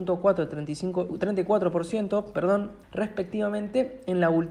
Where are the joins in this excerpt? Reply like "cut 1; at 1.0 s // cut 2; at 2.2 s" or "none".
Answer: cut 1; at 2.8 s

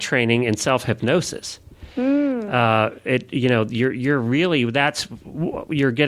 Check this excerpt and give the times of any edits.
none

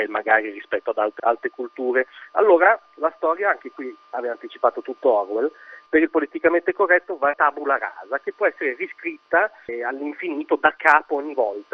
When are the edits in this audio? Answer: cut 1; at 1.2 s // cut 2; at 7.3 s

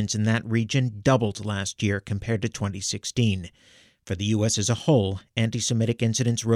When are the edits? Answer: none

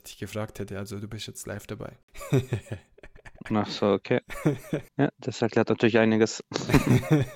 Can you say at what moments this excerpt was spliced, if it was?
cut 1; at 4.9 s

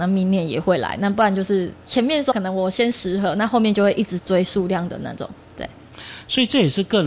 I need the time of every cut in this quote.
cut 1; at 2.3 s

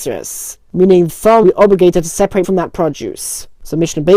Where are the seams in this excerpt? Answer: cut 1; at 1.1 s // cut 2; at 1.4 s // cut 3; at 2.4 s

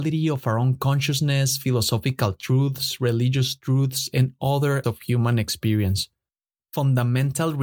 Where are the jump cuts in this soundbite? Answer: cut 1; at 4.8 s

